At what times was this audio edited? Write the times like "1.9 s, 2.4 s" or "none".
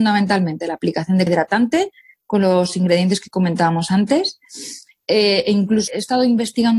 1.3 s, 5.9 s